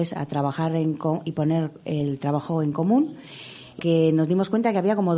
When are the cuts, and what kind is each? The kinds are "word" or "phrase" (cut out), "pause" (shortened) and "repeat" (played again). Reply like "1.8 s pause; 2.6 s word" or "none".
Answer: 3.8 s word